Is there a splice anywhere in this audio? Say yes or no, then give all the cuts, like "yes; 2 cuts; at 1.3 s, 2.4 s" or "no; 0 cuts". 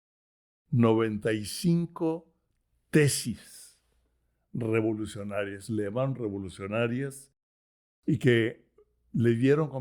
no; 0 cuts